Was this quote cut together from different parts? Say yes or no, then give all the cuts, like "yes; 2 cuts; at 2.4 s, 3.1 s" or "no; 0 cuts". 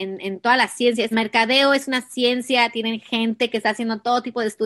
yes; 1 cut; at 1.1 s